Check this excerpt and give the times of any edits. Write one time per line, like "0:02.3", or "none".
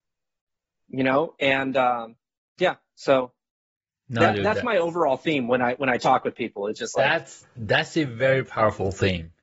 none